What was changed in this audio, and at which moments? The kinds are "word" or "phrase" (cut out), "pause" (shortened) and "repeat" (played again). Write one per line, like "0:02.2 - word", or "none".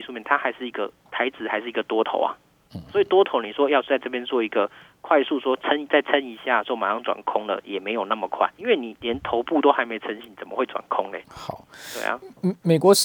0:08.6 - word
0:11.2 - pause